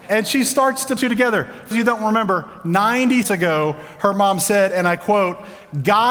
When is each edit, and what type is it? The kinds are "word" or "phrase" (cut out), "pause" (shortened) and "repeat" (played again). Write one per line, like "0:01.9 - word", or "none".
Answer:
0:01.0 - phrase
0:01.7 - word
0:03.2 - word